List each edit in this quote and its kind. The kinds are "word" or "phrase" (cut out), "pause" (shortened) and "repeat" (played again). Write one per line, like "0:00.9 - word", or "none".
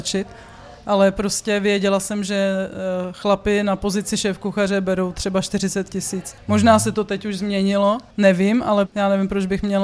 0:06.4 - pause
0:08.1 - pause
0:08.9 - word